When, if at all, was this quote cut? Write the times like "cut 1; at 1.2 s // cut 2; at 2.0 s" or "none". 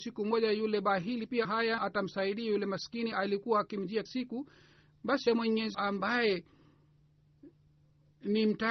cut 1; at 1.4 s // cut 2; at 1.8 s // cut 3; at 3.1 s // cut 4; at 4.1 s // cut 5; at 5.3 s // cut 6; at 5.7 s